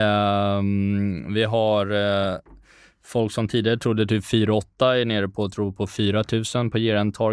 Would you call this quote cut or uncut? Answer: uncut